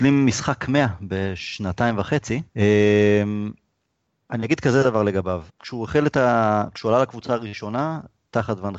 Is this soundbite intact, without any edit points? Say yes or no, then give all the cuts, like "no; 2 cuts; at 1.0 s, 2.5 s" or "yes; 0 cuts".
no; 2 cuts; at 2.5 s, 5.5 s